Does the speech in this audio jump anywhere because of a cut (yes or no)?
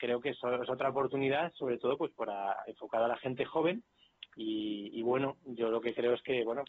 no